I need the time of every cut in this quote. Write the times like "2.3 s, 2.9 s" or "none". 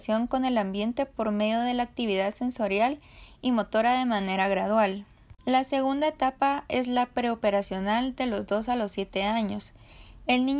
5.4 s